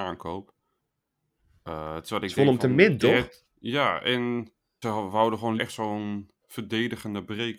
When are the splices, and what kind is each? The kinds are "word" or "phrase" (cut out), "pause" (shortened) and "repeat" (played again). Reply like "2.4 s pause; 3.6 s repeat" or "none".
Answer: 3.5 s pause; 4.8 s word; 5.6 s word